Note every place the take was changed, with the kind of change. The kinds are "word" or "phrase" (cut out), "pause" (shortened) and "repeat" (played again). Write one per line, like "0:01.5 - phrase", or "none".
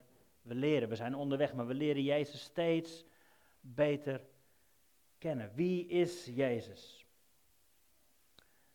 none

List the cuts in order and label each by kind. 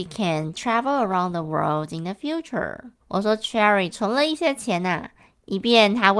0:03.0 - pause

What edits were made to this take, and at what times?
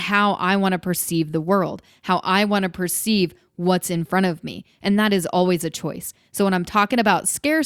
none

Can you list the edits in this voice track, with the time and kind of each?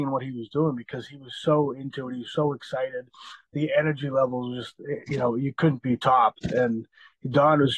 none

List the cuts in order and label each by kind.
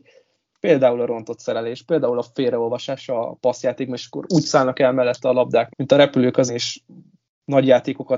0:05.7 - word
0:06.5 - word

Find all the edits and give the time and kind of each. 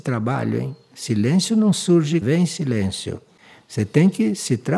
0:02.2 - phrase

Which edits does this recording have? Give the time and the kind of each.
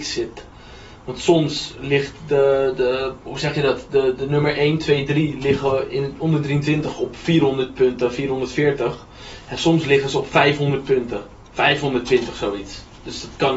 0:03.2 - pause

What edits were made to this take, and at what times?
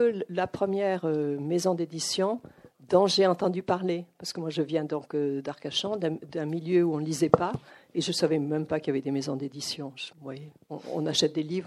0:10.1 - pause

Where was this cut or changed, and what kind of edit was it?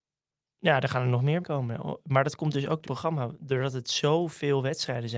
0:01.4 - word
0:02.9 - word

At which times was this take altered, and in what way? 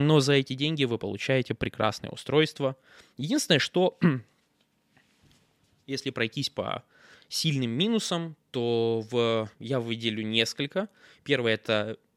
0:09.5 - pause

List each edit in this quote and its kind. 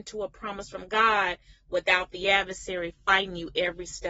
none

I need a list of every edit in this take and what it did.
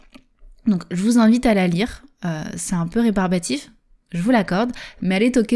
none

